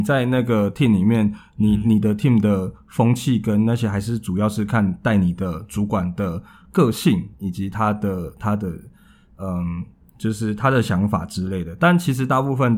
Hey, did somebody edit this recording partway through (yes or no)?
no